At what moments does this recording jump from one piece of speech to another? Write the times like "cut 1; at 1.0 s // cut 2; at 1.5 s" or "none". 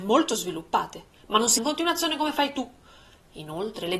cut 1; at 1.6 s